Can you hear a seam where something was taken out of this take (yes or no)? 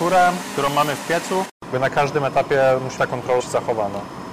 yes